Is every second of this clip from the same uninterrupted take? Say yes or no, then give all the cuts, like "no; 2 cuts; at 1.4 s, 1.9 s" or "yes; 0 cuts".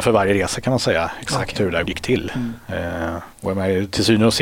no; 2 cuts; at 1.8 s, 3.3 s